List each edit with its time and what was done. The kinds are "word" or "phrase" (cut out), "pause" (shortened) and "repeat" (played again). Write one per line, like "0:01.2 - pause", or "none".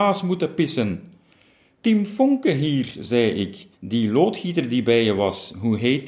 0:03.7 - pause

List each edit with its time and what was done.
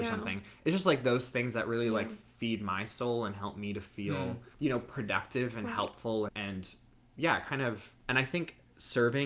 0:04.5 - pause
0:06.3 - word

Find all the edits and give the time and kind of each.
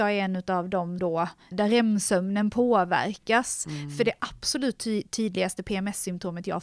0:01.0 - word
0:01.5 - word

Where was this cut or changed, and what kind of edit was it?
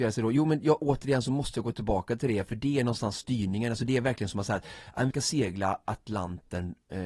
0:05.1 - word

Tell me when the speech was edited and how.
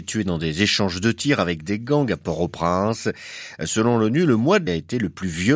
0:04.7 - word

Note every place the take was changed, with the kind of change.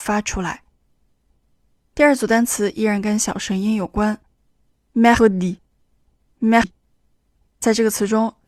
0:05.2 - word
0:06.6 - phrase

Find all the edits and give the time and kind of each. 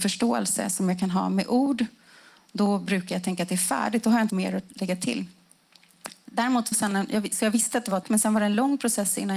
0:04.3 - word
0:06.7 - phrase
0:08.0 - word

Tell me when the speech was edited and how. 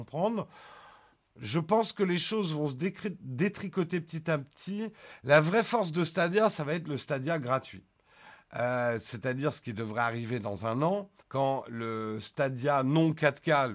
0:11.2 - pause

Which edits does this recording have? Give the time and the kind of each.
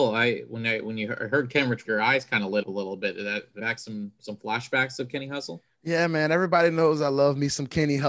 0:01.8 - phrase
0:02.6 - word
0:03.6 - phrase
0:04.2 - word
0:05.7 - pause

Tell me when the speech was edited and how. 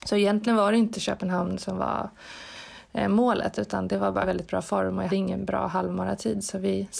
0:04.2 - phrase
0:05.1 - word

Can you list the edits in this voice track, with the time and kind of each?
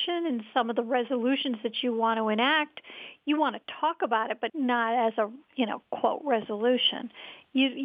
0:04.5 - word

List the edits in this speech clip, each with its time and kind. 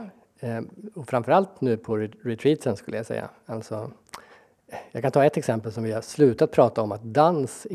none

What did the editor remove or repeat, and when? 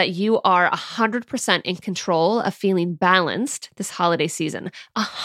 none

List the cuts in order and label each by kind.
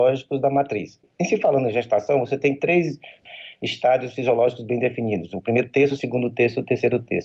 none

